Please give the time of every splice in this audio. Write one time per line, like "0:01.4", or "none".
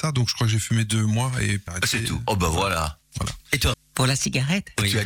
0:01.7
0:03.7